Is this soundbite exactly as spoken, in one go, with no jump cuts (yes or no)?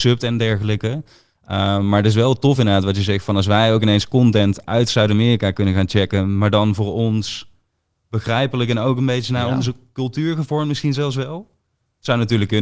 yes